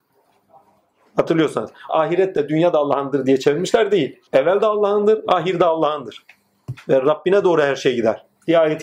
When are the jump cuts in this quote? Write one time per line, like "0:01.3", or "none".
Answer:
0:01.9
0:04.3